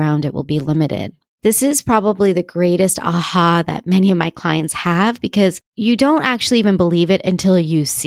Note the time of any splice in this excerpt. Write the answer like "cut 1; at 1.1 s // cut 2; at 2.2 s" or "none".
cut 1; at 1.3 s // cut 2; at 5.7 s

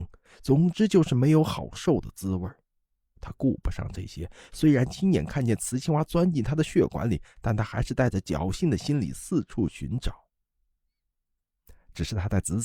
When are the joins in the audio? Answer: none

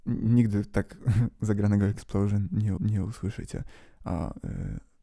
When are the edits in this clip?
cut 1; at 2.8 s

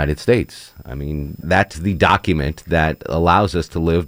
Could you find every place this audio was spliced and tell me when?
cut 1; at 1.4 s // cut 2; at 1.7 s

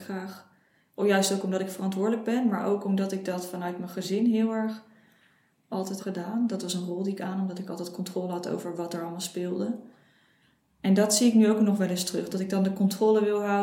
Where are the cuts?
cut 1; at 6.0 s

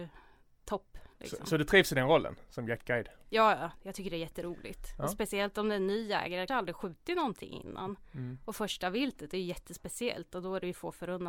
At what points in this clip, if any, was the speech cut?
cut 1; at 6.5 s

